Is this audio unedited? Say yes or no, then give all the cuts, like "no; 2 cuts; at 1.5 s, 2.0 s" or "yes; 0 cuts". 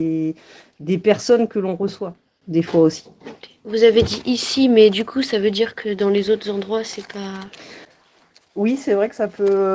yes; 0 cuts